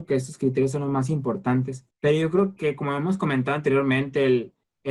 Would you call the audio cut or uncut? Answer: cut